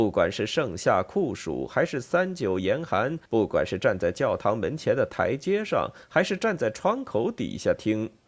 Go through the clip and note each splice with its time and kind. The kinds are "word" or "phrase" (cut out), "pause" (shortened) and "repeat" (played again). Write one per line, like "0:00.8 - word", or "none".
0:03.3 - pause

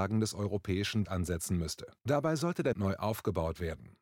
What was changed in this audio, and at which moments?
0:01.0 - word
0:02.0 - pause
0:02.7 - word

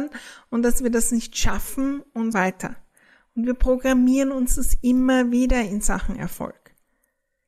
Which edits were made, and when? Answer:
0:02.3 - word

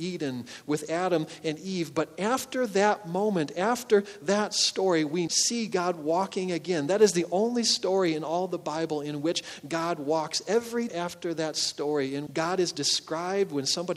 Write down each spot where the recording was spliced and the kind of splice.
0:05.3 - word
0:10.9 - word
0:12.3 - word

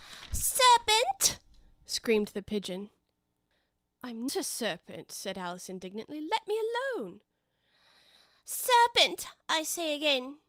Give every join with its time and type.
0:04.3 - word

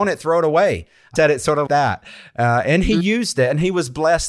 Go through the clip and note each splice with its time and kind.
0:01.2 - word
0:01.7 - word

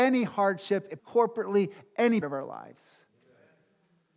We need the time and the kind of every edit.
0:01.0 - word
0:02.2 - word

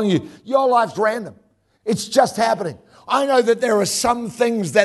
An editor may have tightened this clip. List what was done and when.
0:00.9 - word

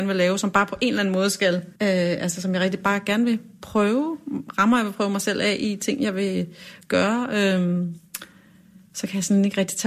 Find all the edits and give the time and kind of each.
0:01.8 - pause

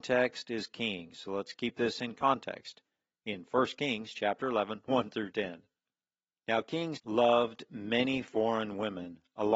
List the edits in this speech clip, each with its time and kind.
0:04.8 - word
0:07.0 - word

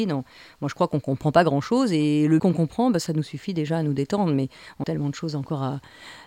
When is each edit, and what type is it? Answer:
0:02.4 - word
0:04.8 - phrase

